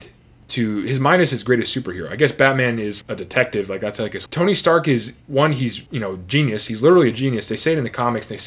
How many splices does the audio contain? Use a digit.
4